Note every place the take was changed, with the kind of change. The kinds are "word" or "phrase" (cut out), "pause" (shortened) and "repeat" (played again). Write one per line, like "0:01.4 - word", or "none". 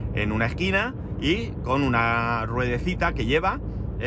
none